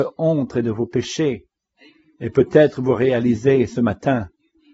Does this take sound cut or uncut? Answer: uncut